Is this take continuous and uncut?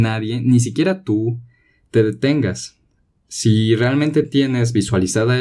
yes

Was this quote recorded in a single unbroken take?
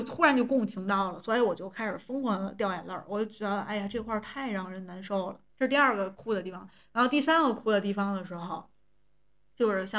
no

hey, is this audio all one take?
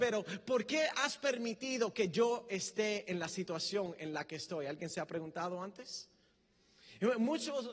yes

